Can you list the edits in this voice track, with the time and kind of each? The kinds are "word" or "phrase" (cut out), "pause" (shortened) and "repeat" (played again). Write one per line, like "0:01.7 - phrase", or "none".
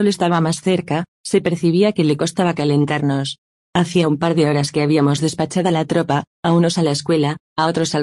none